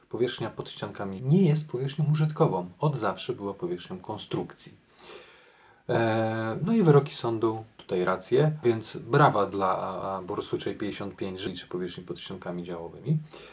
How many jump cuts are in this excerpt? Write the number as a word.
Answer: four